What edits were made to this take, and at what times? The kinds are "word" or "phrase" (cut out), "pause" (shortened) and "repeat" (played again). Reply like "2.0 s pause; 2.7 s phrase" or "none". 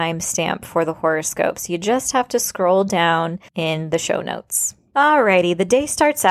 3.5 s pause